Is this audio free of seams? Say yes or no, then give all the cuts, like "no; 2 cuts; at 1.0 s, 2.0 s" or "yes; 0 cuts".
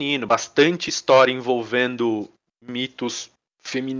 yes; 0 cuts